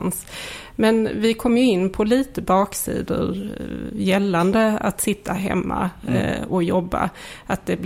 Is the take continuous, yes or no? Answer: yes